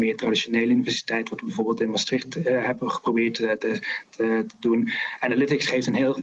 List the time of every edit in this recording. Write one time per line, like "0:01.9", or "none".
none